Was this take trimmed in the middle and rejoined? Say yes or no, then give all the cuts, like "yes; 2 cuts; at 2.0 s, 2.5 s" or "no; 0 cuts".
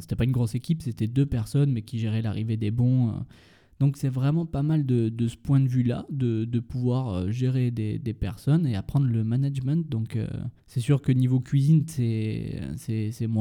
yes; 1 cut; at 10.6 s